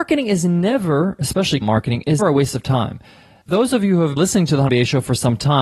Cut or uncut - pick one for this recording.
cut